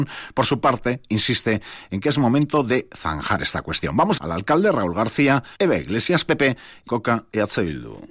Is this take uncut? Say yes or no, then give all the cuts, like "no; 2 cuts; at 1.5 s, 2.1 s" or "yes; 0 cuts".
no; 3 cuts; at 4.2 s, 5.5 s, 6.9 s